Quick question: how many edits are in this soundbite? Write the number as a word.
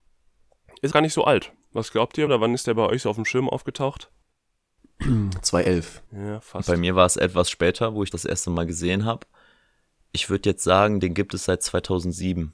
four